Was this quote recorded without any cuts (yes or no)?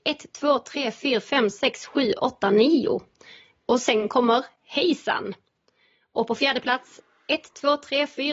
yes